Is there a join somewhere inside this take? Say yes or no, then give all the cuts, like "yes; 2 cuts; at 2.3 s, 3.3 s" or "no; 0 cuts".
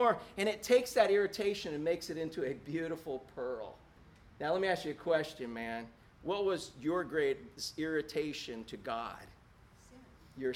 no; 0 cuts